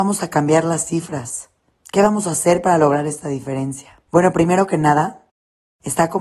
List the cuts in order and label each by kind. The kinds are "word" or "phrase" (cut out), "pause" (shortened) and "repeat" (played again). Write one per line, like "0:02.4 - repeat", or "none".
0:01.7 - pause
0:04.0 - pause